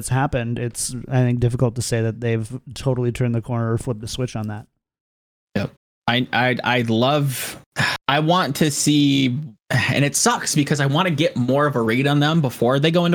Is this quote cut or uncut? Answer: cut